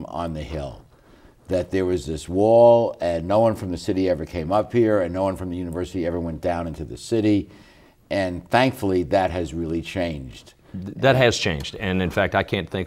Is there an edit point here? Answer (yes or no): no